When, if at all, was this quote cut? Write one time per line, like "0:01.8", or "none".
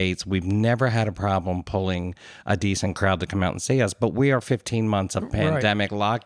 none